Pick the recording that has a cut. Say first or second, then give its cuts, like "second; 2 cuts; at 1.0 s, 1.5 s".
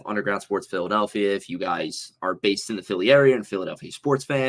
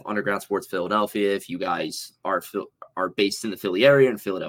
first; 1 cut; at 2.2 s